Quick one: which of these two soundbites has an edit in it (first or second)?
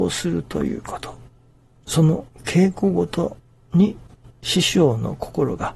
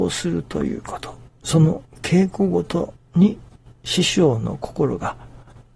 second